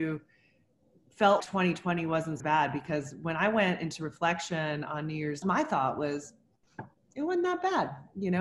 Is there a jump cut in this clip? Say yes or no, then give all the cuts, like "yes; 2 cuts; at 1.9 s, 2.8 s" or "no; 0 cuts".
yes; 4 cuts; at 1.4 s, 2.4 s, 5.4 s, 7.0 s